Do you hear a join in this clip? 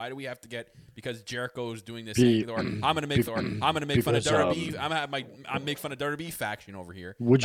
yes; 1 cut; at 3.3 s

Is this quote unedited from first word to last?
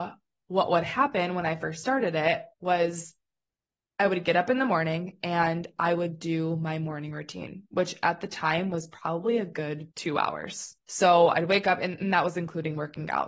no; 2 cuts; at 9.9 s, 10.8 s

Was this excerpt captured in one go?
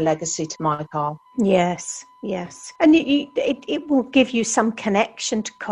no; 2 cuts; at 1.3 s, 2.8 s

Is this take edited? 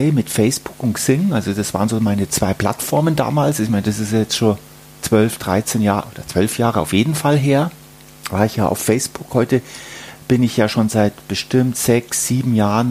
no; 0 cuts

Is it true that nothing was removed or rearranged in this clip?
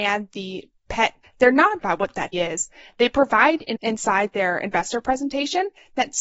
no; 4 cuts; at 1.2 s, 1.8 s, 2.3 s, 3.8 s

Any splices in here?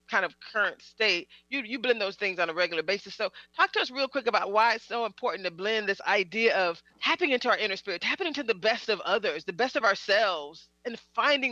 yes; 1 cut; at 6.9 s

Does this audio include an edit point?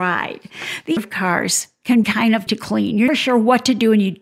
yes; 4 cuts; at 1.0 s, 2.0 s, 2.5 s, 3.1 s

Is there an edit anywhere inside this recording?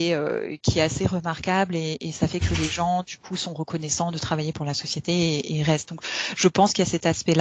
no; 0 cuts

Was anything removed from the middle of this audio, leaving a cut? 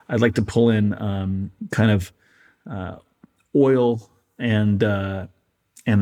no; 0 cuts

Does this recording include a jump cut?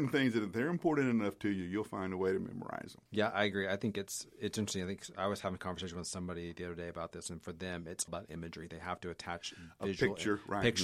yes; 2 cuts; at 3.1 s, 8.1 s

